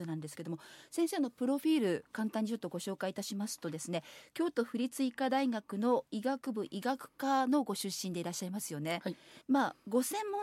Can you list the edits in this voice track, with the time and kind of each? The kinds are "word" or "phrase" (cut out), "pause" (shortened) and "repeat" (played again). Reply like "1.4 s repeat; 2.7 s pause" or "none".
9.4 s word

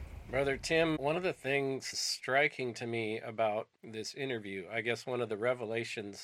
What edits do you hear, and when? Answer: 1.0 s word; 1.9 s phrase; 3.7 s pause

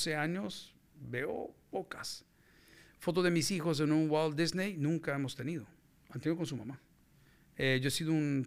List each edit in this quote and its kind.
none

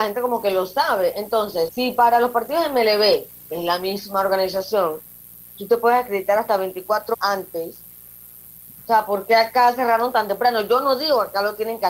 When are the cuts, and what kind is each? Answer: 1.7 s word; 7.1 s word

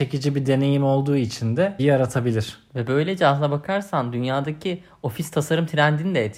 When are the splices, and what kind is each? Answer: 1.8 s phrase

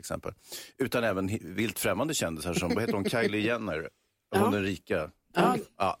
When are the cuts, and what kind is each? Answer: none

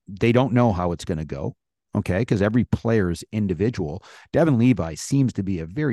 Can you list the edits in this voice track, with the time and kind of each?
none

